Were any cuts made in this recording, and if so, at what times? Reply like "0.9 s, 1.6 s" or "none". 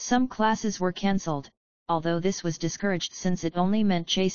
none